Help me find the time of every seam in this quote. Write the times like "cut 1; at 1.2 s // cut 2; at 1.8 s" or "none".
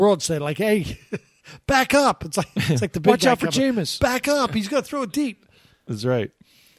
none